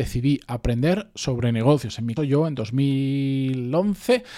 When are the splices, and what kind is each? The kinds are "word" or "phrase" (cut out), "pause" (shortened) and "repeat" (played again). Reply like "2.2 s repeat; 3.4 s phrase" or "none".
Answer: 2.2 s word